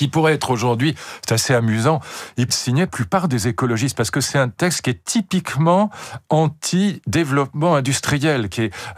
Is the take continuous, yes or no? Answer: no